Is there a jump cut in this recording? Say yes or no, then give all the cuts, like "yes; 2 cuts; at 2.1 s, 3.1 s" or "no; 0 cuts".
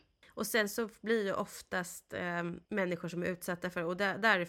yes; 1 cut; at 2.6 s